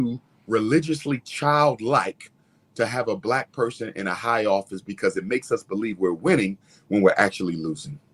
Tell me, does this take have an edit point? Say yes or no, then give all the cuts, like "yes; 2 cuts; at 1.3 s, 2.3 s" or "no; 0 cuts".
no; 0 cuts